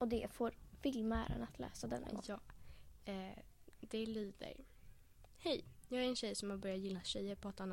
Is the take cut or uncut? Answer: uncut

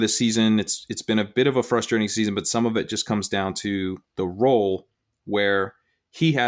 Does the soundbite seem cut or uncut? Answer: uncut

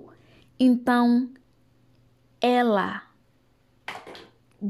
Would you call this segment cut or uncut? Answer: uncut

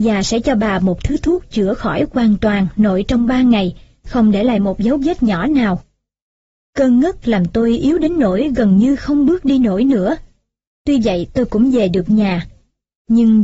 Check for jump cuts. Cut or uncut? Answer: uncut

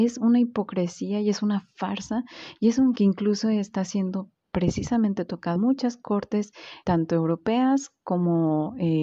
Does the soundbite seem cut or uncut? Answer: cut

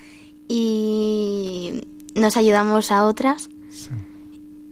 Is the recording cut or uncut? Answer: cut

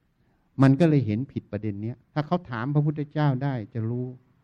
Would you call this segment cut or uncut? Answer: cut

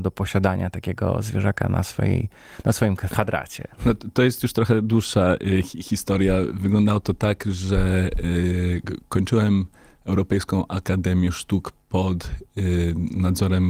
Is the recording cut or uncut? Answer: uncut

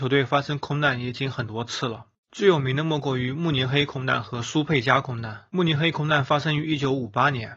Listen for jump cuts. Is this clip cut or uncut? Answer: cut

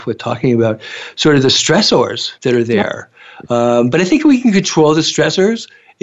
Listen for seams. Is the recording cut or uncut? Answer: cut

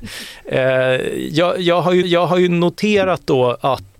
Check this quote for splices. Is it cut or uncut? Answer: cut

